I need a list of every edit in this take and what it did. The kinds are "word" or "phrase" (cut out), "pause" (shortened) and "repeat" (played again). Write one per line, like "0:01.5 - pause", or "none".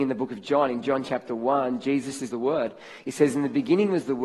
0:02.3 - phrase